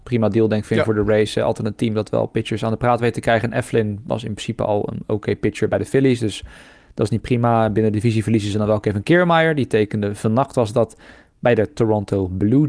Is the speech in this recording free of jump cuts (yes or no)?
yes